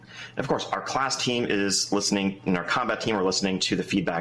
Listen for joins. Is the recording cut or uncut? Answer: uncut